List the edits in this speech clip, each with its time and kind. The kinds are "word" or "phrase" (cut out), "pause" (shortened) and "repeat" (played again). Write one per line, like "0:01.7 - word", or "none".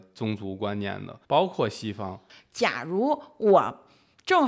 0:01.2 - pause